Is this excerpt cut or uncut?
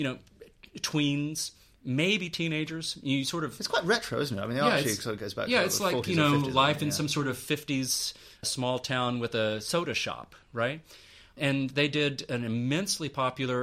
uncut